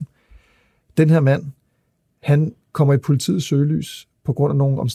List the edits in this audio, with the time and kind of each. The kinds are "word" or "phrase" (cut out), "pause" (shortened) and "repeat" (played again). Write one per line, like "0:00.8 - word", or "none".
none